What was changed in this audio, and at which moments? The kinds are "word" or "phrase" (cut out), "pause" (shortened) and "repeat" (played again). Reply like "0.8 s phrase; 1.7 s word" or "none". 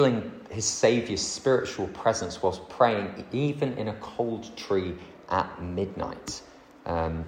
none